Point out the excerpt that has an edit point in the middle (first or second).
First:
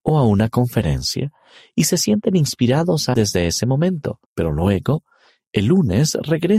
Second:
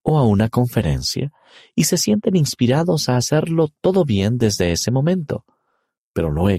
first